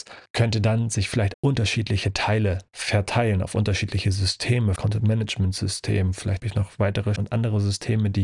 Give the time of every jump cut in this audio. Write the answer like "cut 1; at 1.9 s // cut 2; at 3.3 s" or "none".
cut 1; at 1.3 s // cut 2; at 4.8 s // cut 3; at 6.4 s // cut 4; at 7.2 s